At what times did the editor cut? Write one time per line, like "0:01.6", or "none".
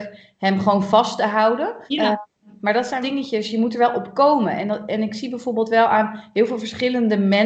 0:01.9
0:03.0